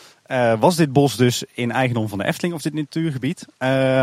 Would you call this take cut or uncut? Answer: uncut